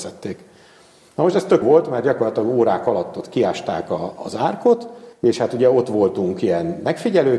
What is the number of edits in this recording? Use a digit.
2